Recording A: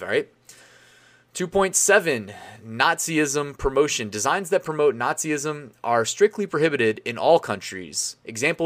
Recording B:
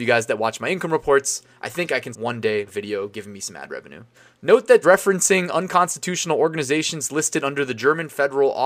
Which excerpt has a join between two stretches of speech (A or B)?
B